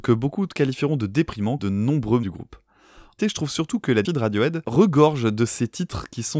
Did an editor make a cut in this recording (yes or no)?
yes